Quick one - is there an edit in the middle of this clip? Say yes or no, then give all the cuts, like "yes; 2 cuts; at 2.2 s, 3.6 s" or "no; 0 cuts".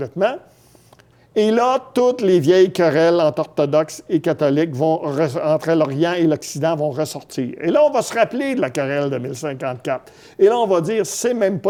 no; 0 cuts